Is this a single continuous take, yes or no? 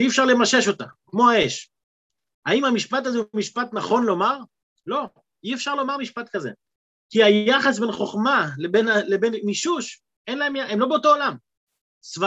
yes